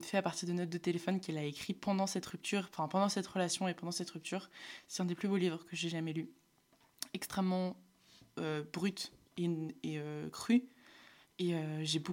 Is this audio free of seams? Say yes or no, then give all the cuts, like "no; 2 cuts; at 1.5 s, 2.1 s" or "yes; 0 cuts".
yes; 0 cuts